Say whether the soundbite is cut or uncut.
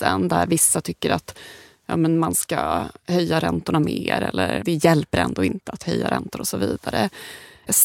uncut